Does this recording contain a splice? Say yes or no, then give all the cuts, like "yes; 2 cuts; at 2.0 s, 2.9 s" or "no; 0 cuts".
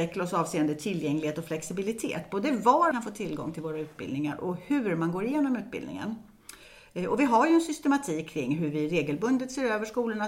yes; 1 cut; at 2.9 s